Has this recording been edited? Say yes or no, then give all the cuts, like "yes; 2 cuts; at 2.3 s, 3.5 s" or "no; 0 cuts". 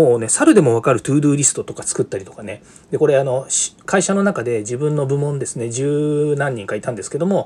no; 0 cuts